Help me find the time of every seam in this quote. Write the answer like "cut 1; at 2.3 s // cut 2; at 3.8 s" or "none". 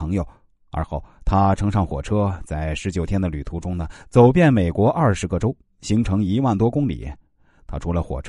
none